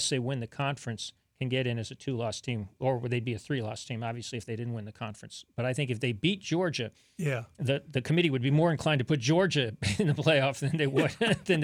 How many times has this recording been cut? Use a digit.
0